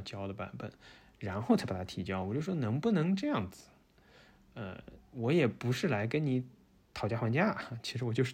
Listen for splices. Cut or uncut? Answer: uncut